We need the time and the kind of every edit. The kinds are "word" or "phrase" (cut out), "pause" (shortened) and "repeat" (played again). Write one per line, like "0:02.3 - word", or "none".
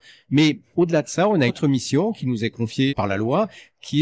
0:01.5 - word
0:02.9 - word